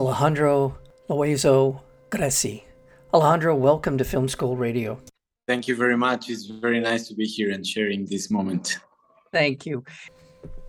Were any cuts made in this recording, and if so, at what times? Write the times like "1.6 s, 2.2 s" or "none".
none